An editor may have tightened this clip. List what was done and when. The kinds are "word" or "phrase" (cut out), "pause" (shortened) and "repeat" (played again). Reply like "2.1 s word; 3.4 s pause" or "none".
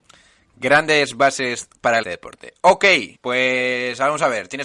2.0 s phrase; 3.1 s pause

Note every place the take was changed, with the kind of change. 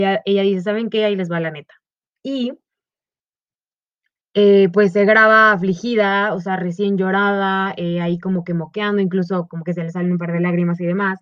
2.0 s pause

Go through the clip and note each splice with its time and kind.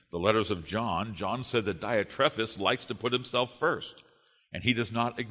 none

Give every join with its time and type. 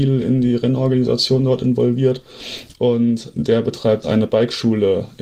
3.3 s word; 4.0 s word

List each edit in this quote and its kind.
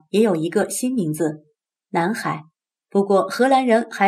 2.6 s pause

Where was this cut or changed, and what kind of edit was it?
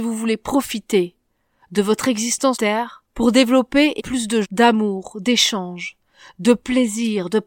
2.5 s word; 3.1 s pause; 4.0 s word; 4.4 s word

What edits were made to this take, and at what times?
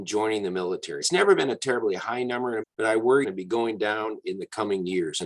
1.0 s word; 2.6 s phrase; 3.2 s phrase

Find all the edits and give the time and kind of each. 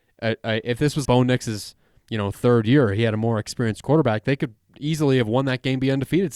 1.0 s word

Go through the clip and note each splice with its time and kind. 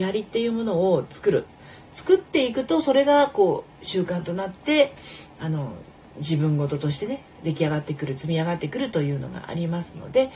3.7 s pause

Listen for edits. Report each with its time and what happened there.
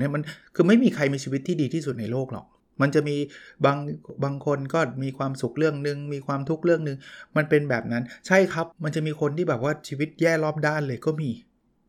2.6 s pause; 8.7 s pause

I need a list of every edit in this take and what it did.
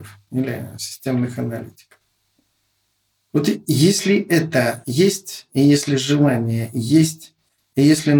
none

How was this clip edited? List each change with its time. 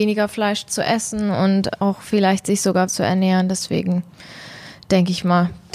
2.9 s word

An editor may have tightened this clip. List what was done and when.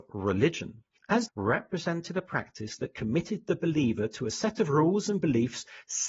1.3 s phrase

